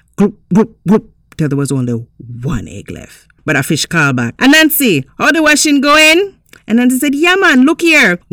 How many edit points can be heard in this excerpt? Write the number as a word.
zero